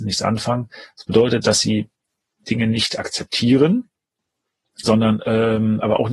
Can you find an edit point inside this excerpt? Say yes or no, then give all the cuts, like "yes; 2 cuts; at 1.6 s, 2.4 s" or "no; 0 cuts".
yes; 1 cut; at 4.8 s